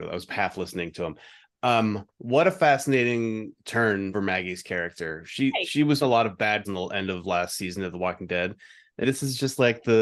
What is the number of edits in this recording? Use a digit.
4